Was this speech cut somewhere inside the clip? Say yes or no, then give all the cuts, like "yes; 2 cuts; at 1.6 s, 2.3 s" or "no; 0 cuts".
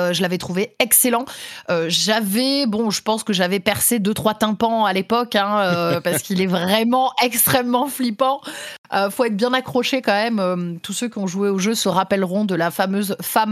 no; 0 cuts